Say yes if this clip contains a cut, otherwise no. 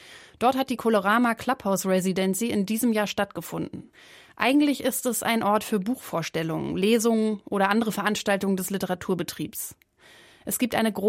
no